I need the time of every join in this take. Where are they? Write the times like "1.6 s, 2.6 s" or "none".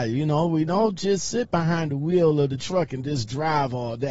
none